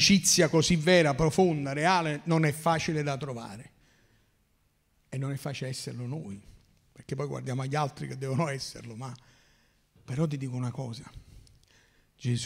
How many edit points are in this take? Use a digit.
0